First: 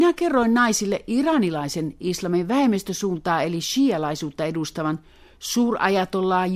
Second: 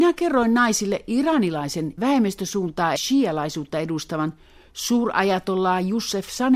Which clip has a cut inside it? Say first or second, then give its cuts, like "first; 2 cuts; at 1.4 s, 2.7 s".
second; 2 cuts; at 2.0 s, 3.0 s